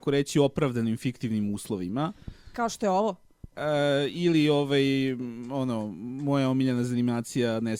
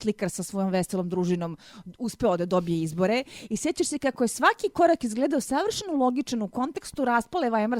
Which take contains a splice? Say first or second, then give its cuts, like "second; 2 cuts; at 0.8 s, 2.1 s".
first; 1 cut; at 3.5 s